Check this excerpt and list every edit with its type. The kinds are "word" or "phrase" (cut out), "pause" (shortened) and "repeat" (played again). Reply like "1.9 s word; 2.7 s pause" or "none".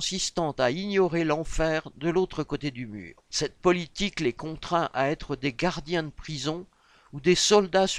3.3 s pause

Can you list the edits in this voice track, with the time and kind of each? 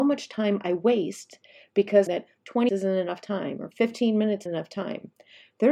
2.1 s phrase; 2.7 s word; 4.5 s word

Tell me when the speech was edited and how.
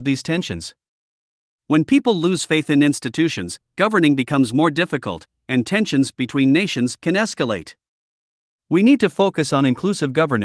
none

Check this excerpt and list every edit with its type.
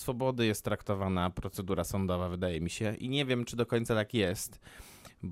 none

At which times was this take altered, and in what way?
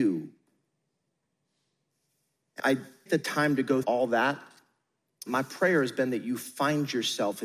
2.6 s word; 3.1 s word; 3.8 s word; 5.3 s word

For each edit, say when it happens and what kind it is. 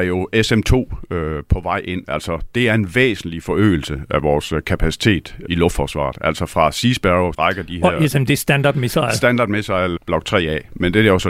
5.5 s word; 7.3 s word; 10.0 s word

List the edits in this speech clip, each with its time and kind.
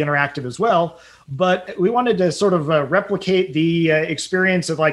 none

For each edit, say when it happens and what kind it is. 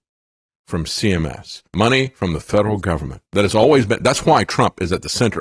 1.7 s pause; 3.3 s pause

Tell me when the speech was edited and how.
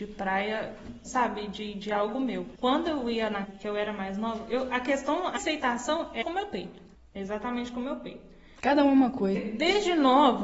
1.0 s word; 2.5 s pause; 3.4 s word; 5.4 s word; 6.2 s word; 6.9 s pause; 9.3 s word

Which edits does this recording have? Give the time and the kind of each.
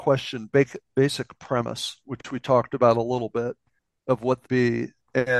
3.8 s pause; 4.5 s word

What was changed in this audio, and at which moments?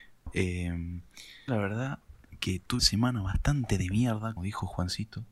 1.5 s word; 2.8 s word; 4.4 s word

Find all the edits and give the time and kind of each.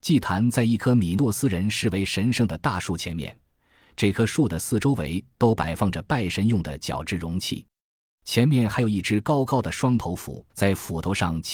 10.5 s pause

